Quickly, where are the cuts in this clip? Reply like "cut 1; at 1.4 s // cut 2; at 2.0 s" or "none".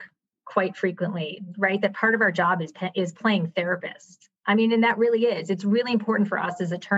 cut 1; at 4.4 s